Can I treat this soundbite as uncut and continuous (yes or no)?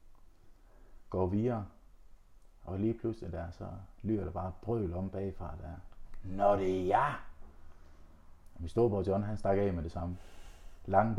yes